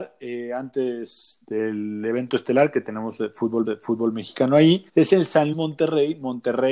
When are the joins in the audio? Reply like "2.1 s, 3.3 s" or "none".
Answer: 3.6 s, 4.9 s, 5.5 s